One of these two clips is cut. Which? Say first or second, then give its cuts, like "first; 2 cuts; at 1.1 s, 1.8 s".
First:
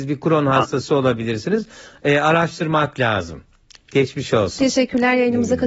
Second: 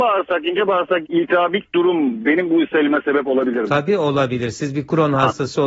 second; 1 cut; at 1.0 s